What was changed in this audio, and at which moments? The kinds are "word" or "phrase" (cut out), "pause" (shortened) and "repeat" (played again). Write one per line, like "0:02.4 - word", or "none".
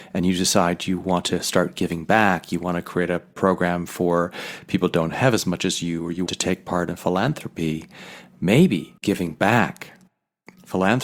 0:06.3 - word
0:09.0 - pause